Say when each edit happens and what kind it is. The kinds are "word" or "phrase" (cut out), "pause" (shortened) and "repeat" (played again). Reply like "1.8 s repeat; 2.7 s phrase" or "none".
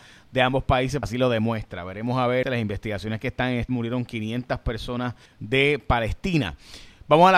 1.0 s word; 2.4 s word; 3.7 s word; 5.3 s pause